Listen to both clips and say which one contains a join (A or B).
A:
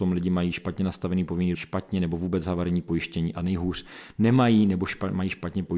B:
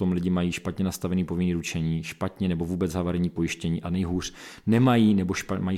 A